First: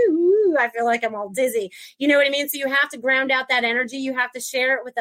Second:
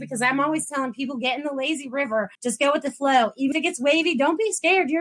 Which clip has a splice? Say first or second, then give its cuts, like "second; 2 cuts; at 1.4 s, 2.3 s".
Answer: second; 2 cuts; at 2.3 s, 3.5 s